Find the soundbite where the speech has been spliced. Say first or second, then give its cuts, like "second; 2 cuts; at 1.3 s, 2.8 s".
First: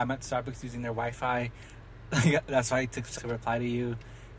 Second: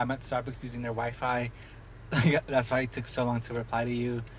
first; 1 cut; at 3.2 s